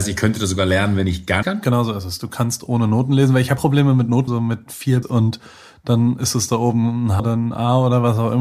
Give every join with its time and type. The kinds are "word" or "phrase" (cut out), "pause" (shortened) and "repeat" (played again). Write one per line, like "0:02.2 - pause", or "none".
0:01.4 - word
0:03.6 - word
0:04.3 - word
0:05.0 - word
0:07.2 - word